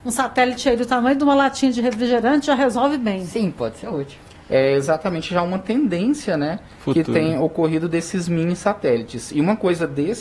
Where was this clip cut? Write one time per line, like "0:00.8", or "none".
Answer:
none